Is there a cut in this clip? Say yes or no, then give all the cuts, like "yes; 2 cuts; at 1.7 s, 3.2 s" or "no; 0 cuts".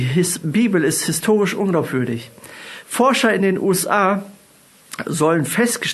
no; 0 cuts